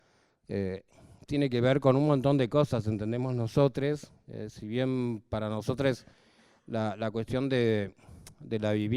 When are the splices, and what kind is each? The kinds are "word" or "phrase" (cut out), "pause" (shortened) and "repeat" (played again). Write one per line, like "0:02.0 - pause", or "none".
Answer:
none